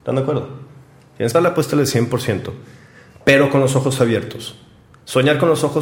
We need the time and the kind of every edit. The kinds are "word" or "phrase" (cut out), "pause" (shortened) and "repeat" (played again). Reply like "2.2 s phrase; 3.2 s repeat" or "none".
1.3 s word